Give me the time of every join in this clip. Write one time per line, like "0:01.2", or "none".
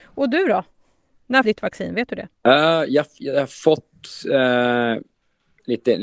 0:01.4
0:02.4